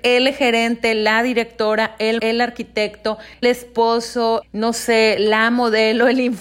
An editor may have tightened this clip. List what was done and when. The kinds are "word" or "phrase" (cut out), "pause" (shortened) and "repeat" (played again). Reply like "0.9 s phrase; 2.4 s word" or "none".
2.2 s word; 3.4 s word; 4.4 s word